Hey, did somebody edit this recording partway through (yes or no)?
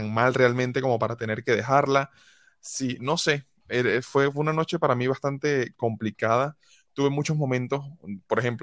no